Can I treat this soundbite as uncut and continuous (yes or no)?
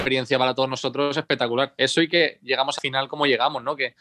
no